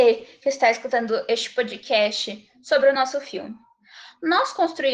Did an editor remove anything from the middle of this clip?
no; 0 cuts

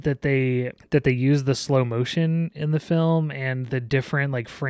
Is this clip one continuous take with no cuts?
yes; 0 cuts

